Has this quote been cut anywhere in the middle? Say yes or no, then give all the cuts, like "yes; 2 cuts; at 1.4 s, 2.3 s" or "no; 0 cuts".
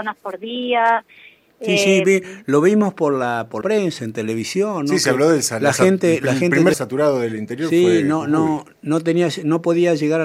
yes; 2 cuts; at 3.6 s, 6.7 s